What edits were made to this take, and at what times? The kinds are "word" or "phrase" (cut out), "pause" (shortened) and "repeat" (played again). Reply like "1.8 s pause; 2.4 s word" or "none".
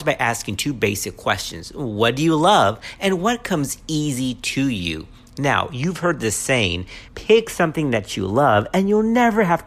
7.1 s pause